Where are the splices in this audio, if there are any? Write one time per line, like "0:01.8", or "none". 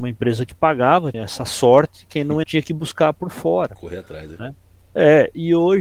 0:01.1
0:02.4